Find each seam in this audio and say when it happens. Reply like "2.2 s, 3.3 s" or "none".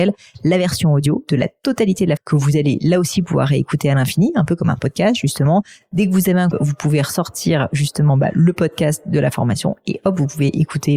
2.2 s, 6.5 s